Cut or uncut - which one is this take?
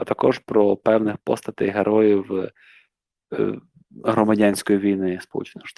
uncut